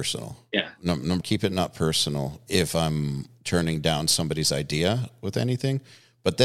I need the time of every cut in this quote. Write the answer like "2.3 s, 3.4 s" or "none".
1.2 s